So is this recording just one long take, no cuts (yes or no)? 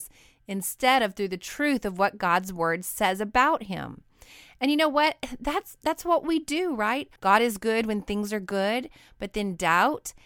no